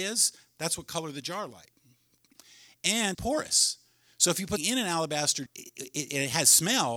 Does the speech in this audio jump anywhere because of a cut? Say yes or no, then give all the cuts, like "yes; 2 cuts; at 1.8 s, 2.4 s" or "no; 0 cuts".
yes; 4 cuts; at 1.5 s, 3.1 s, 4.6 s, 5.5 s